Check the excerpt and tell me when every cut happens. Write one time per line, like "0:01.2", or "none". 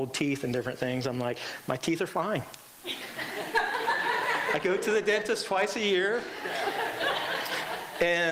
none